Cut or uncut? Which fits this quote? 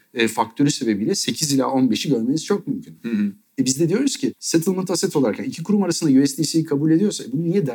uncut